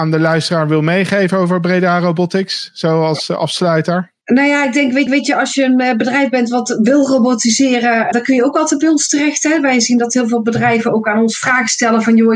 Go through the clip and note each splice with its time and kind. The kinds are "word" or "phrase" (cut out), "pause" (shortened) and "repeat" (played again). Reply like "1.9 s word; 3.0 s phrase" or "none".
4.2 s pause; 5.1 s repeat; 8.1 s word